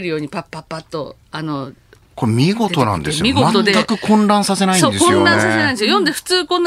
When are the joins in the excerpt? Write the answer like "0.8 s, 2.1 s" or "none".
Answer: none